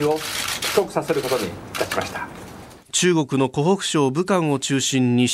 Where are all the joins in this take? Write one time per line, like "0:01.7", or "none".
0:02.8

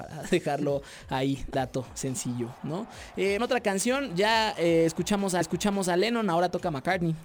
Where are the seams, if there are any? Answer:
0:01.5
0:03.4
0:05.4

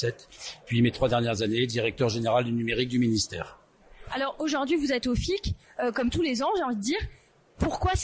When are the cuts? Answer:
none

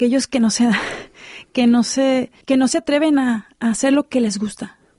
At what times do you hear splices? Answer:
0:02.4

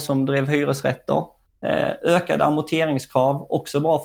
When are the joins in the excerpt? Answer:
none

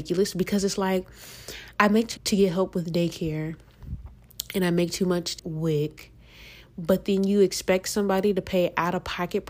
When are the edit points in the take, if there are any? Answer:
0:01.7
0:02.2
0:05.4

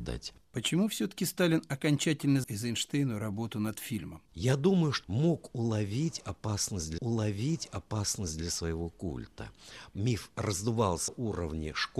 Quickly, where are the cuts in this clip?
0:02.4
0:04.2
0:05.0
0:07.0
0:11.1

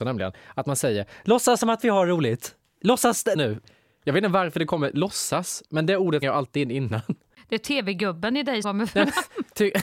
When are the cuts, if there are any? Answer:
0:03.3
0:06.2
0:08.6

